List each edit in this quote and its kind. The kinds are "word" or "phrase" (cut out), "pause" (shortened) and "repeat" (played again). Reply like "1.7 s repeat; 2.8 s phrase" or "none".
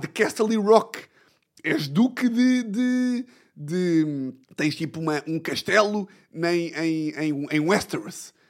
4.4 s pause